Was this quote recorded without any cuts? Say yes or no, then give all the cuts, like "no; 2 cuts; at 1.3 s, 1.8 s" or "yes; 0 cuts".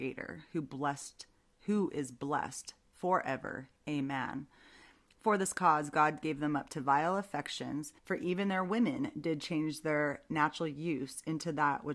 no; 1 cut; at 8.0 s